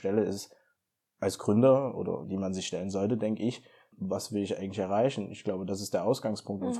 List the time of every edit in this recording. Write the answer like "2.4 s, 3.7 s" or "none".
2.2 s